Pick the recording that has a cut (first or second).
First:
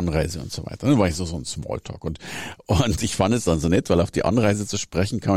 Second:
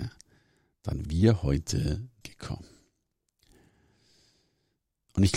second